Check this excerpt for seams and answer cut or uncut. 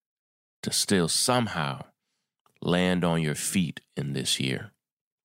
uncut